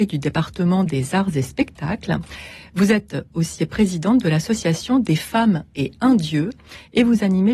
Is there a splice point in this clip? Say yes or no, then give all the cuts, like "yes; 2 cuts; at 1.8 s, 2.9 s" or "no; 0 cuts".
yes; 1 cut; at 3.6 s